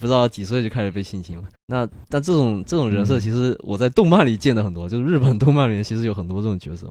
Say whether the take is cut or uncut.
cut